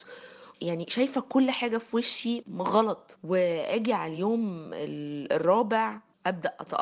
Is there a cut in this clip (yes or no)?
no